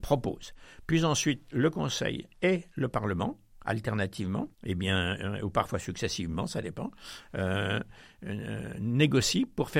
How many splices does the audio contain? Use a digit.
1